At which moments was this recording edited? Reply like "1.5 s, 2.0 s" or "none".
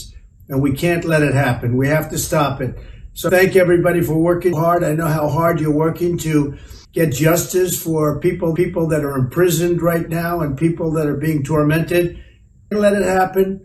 3.3 s, 4.5 s, 6.8 s, 8.6 s, 12.7 s